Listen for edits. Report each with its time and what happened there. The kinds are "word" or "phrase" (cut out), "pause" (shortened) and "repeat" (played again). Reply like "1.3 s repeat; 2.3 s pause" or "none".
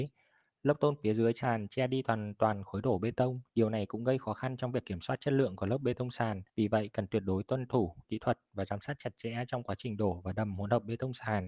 3.5 s pause; 6.5 s pause